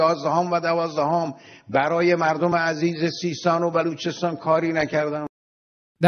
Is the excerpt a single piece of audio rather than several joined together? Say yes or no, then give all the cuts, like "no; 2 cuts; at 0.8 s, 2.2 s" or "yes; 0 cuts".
yes; 0 cuts